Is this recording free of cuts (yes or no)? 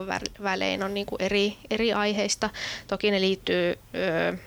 yes